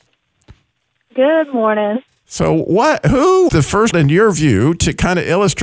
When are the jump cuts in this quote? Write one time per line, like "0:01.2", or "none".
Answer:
0:02.1
0:03.5
0:03.9